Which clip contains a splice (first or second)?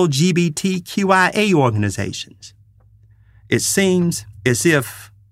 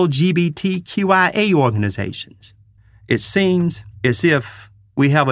second